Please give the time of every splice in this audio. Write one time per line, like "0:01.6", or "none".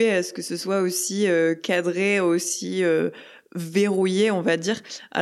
none